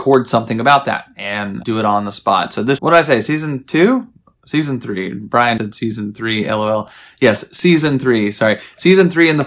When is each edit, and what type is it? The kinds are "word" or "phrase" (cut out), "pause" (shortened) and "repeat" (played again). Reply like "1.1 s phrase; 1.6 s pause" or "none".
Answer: 1.6 s word; 2.8 s phrase; 5.6 s word